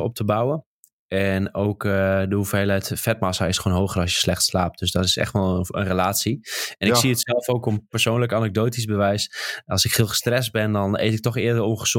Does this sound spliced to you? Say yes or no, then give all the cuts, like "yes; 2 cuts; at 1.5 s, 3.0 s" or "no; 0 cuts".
no; 0 cuts